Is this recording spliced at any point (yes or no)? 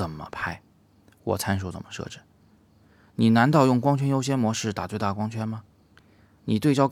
no